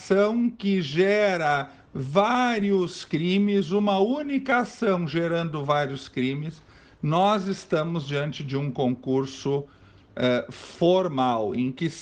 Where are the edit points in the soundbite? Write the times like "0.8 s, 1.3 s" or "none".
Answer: none

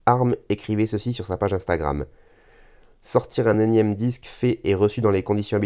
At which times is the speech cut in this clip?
none

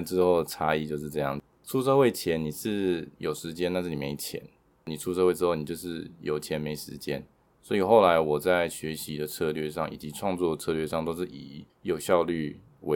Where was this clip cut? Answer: 7.5 s, 11.7 s

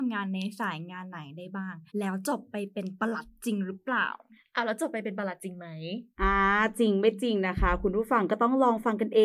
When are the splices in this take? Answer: 1.9 s, 6.1 s

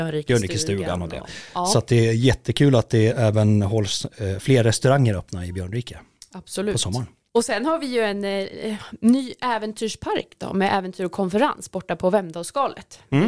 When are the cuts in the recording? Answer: none

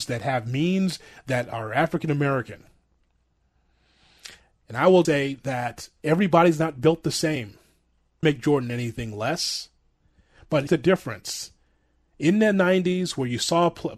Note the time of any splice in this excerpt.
5.0 s, 8.2 s, 10.7 s

